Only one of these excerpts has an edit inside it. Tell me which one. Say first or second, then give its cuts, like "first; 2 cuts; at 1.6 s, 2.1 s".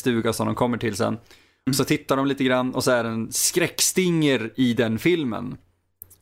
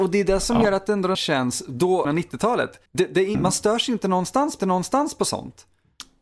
second; 4 cuts; at 1.1 s, 2.0 s, 2.9 s, 4.6 s